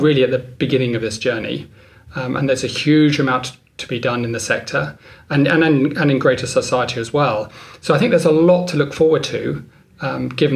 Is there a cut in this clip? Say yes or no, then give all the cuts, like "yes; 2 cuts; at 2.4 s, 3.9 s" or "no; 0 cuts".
no; 0 cuts